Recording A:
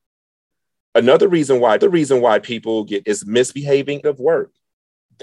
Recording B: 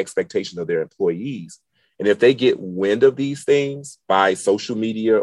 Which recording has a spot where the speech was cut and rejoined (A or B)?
A